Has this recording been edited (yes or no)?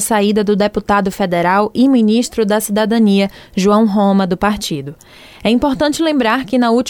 no